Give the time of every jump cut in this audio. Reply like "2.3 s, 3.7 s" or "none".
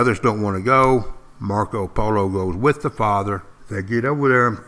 3.6 s